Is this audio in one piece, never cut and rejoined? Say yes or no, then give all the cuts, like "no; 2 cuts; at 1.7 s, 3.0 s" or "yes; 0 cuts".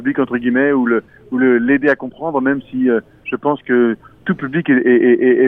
yes; 0 cuts